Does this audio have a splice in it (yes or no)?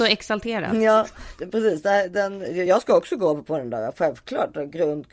no